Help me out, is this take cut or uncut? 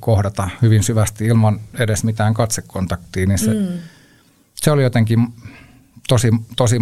uncut